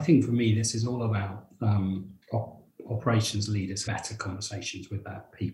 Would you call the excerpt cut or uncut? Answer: cut